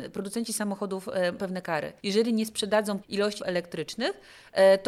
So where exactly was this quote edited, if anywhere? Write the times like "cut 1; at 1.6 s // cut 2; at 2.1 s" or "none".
cut 1; at 1.4 s // cut 2; at 2.0 s // cut 3; at 3.0 s // cut 4; at 3.4 s